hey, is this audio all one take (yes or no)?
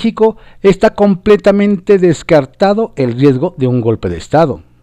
yes